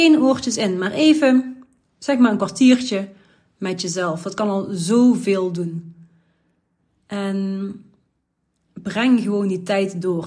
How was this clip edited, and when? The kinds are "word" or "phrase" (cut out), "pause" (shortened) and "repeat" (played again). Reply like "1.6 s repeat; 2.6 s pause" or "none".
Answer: none